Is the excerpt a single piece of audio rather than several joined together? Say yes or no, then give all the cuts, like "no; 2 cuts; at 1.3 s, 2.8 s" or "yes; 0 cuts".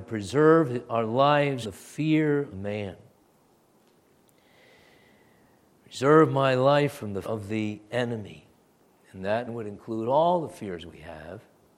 no; 4 cuts; at 1.6 s, 2.5 s, 7.2 s, 9.5 s